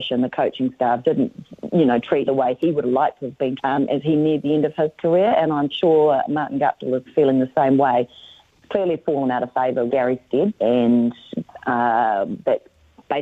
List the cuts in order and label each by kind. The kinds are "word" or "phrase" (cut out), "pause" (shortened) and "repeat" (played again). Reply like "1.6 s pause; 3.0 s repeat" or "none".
2.3 s word; 3.6 s word; 5.7 s word; 7.1 s word; 9.9 s word; 10.6 s word